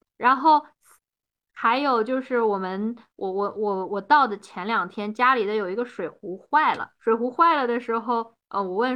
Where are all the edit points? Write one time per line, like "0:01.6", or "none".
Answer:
0:07.0